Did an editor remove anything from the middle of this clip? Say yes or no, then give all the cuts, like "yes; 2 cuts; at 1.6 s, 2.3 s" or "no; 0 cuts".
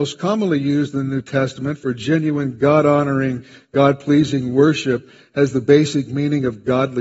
no; 0 cuts